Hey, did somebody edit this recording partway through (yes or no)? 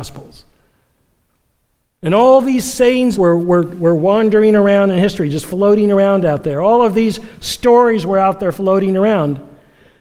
yes